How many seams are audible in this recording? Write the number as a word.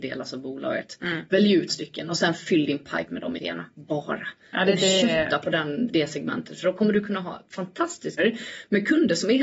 five